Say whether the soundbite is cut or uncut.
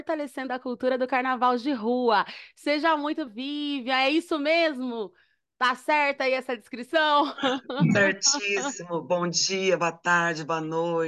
cut